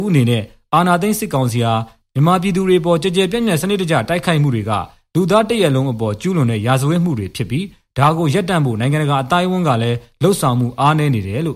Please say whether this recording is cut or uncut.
uncut